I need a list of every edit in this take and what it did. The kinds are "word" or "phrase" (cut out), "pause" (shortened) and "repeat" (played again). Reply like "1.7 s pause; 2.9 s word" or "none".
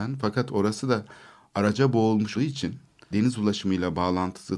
2.3 s word; 3.1 s word